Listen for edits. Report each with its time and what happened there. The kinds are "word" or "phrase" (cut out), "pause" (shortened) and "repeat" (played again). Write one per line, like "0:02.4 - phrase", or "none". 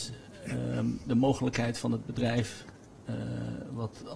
none